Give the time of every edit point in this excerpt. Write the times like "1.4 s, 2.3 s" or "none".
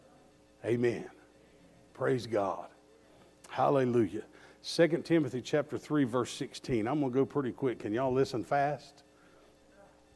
none